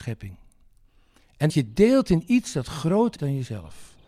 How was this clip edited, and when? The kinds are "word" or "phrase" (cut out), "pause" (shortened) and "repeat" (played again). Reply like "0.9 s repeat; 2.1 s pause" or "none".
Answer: 1.5 s word; 3.2 s word